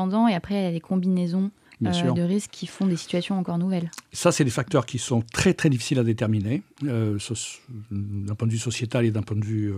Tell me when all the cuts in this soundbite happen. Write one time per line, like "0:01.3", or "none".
0:01.6